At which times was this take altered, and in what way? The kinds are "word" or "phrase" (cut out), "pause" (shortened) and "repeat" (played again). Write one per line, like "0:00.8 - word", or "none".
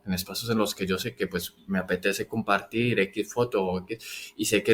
none

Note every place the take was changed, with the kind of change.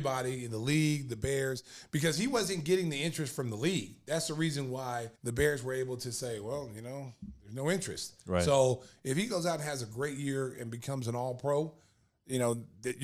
0:05.2 - pause

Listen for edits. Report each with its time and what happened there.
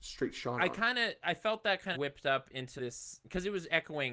0:01.9 - word
0:02.8 - word

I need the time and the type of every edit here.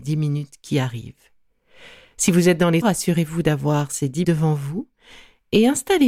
0:02.8 - word
0:04.2 - word

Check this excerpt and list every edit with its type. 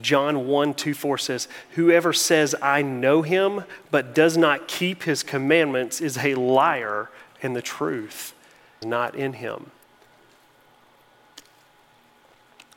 0:08.8 - word

